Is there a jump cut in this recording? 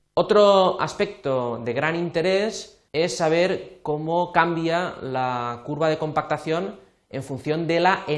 yes; 1 cut; at 2.9 s

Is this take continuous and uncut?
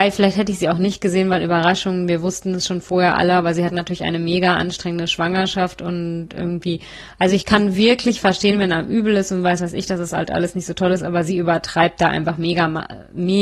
yes; 0 cuts

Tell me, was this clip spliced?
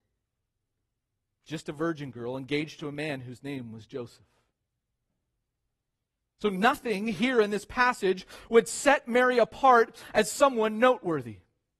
no; 0 cuts

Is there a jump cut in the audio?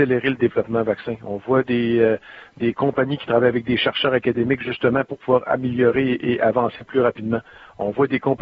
no; 0 cuts

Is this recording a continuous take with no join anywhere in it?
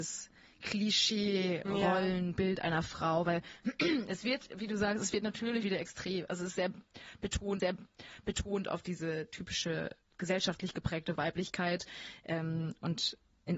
no; 3 cuts; at 5.6 s, 7.6 s, 10.1 s

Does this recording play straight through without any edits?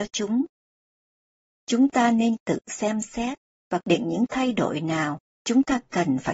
no; 1 cut; at 3.8 s

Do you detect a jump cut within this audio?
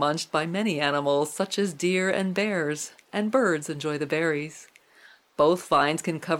no; 0 cuts

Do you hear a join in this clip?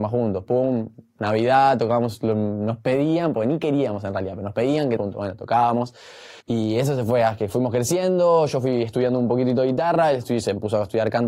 yes; 2 cuts; at 5.0 s, 6.4 s

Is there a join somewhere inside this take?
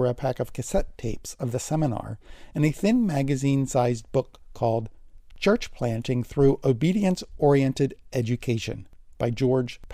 no; 0 cuts

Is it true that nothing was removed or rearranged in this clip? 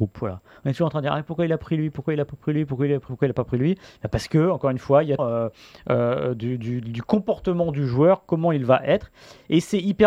no; 2 cuts; at 3.1 s, 5.2 s

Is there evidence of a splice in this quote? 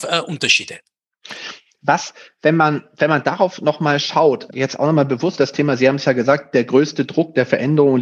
yes; 2 cuts; at 4.5 s, 5.4 s

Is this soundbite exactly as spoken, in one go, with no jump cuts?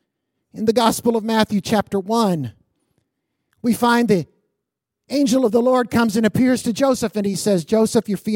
yes; 0 cuts

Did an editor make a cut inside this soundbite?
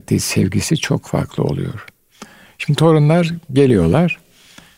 no; 0 cuts

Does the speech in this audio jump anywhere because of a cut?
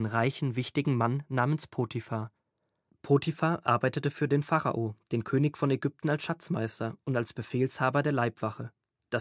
no; 0 cuts

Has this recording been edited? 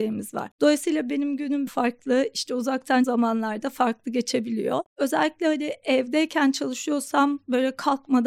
yes; 2 cuts; at 1.7 s, 3.0 s

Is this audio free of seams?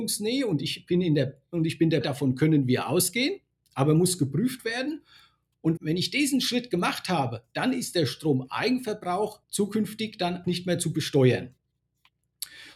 no; 4 cuts; at 2.0 s, 5.8 s, 9.4 s, 10.4 s

